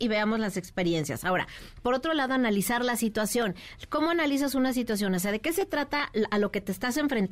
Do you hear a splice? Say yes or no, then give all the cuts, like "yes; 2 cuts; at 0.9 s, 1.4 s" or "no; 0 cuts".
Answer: no; 0 cuts